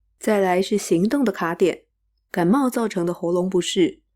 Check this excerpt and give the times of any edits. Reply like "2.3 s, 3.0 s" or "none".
none